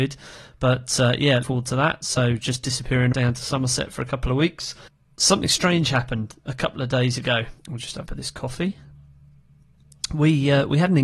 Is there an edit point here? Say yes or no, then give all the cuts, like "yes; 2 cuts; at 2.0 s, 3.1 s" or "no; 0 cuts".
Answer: yes; 4 cuts; at 1.4 s, 3.1 s, 7.6 s, 8.1 s